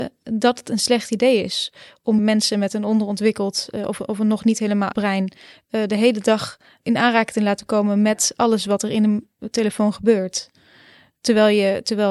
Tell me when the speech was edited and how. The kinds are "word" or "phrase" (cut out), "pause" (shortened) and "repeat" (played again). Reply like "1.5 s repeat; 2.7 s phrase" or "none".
2.2 s word; 4.9 s word; 6.8 s word